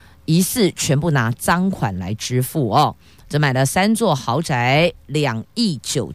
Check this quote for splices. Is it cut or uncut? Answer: uncut